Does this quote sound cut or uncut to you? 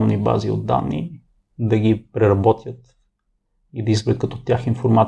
uncut